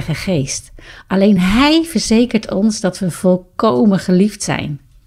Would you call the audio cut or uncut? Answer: uncut